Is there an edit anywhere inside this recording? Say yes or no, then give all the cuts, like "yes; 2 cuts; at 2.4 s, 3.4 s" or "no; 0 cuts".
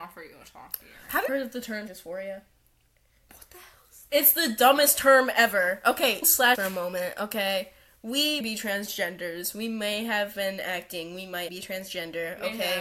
yes; 6 cuts; at 1.3 s, 1.9 s, 6.2 s, 6.6 s, 8.4 s, 11.5 s